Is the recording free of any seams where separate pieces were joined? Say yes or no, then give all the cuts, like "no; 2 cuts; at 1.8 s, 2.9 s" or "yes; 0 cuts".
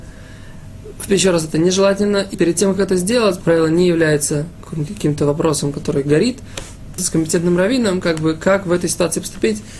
no; 4 cuts; at 1.1 s, 2.3 s, 3.4 s, 7.0 s